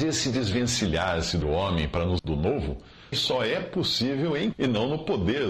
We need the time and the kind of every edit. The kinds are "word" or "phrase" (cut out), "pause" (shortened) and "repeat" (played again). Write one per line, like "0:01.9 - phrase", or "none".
0:01.4 - word
0:02.2 - word
0:03.1 - word
0:04.5 - word